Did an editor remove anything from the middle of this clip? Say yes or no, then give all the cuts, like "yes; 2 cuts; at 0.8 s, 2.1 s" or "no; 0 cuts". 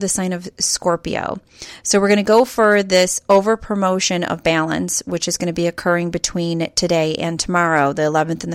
no; 0 cuts